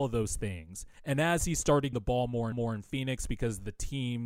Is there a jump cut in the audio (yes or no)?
yes